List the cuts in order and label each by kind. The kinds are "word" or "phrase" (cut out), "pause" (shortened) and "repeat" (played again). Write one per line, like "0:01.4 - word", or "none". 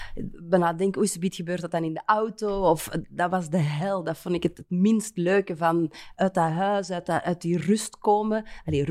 none